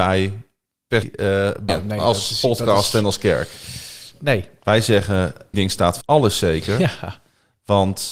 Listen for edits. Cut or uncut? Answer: cut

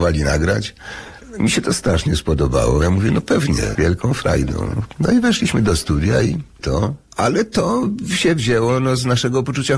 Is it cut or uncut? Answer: cut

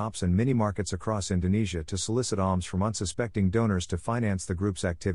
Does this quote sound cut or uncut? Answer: uncut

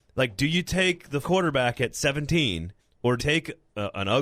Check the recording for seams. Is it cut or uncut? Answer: cut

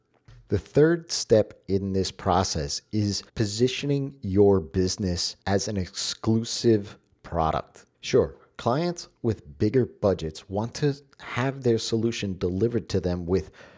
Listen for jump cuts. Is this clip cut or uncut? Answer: cut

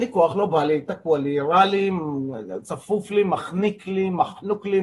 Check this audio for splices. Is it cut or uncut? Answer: uncut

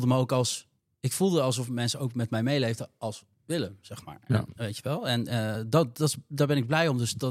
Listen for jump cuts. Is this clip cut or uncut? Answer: uncut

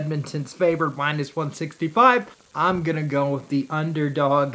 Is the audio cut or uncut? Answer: cut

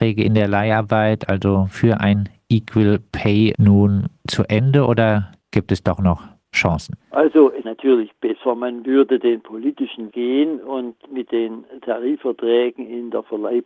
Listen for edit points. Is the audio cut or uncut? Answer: cut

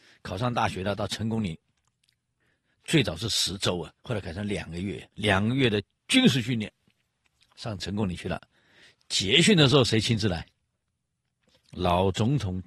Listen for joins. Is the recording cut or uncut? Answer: cut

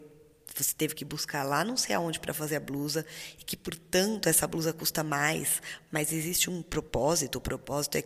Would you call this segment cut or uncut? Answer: uncut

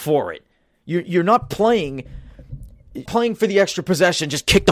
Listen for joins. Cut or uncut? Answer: cut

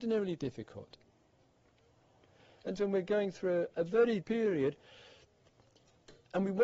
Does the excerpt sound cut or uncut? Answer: cut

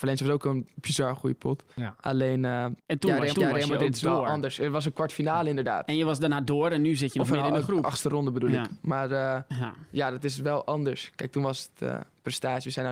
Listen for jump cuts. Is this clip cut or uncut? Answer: cut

